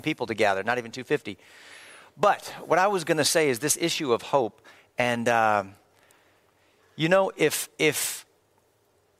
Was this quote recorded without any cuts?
yes; 0 cuts

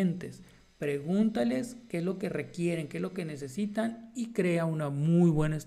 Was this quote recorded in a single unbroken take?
yes; 0 cuts

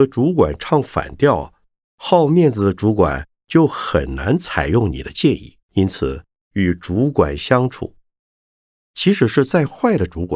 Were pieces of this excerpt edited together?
yes; 1 cut; at 5.6 s

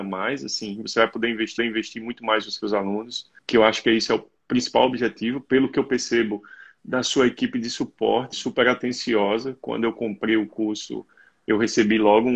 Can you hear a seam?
yes; 3 cuts; at 1.6 s, 3.4 s, 8.3 s

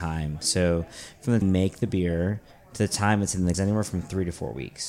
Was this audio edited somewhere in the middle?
yes; 3 cuts; at 1.4 s, 2.5 s, 3.5 s

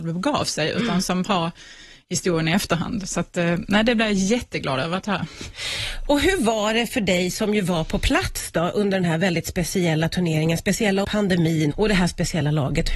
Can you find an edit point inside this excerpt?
yes; 3 cuts; at 1.2 s, 11.0 s, 11.7 s

